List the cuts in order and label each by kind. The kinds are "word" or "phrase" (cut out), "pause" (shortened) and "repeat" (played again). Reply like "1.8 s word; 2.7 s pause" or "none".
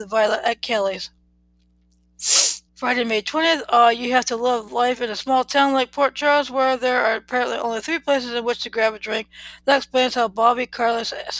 2.7 s pause